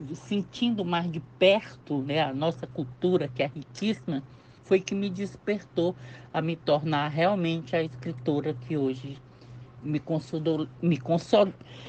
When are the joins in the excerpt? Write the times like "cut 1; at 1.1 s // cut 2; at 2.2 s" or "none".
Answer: cut 1; at 4.6 s // cut 2; at 9.8 s